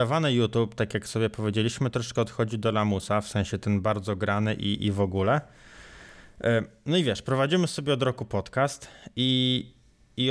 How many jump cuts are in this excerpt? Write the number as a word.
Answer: zero